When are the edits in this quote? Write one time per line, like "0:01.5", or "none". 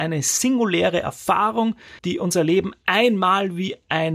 0:02.0

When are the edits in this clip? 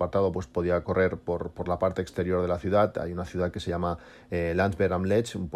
none

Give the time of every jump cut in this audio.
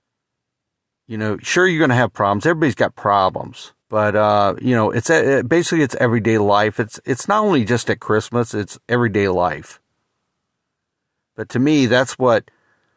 0:03.8

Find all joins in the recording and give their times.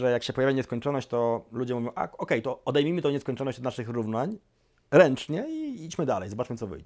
none

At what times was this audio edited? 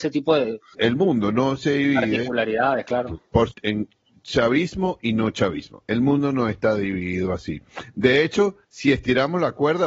0:03.5
0:08.6

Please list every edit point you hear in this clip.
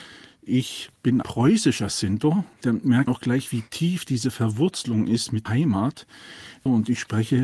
0:01.2
0:02.5
0:03.1
0:05.5

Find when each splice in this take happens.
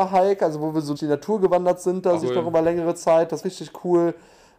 0:01.0
0:02.2
0:03.4

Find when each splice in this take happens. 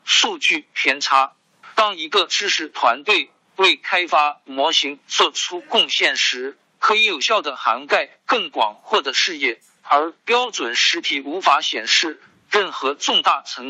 0:04.5

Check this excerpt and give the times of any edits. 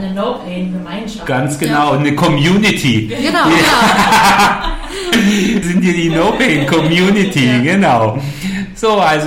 0:05.6

